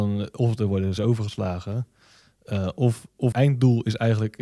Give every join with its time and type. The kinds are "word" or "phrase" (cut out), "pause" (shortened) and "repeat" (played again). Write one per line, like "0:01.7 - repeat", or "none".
0:01.0 - word
0:03.3 - word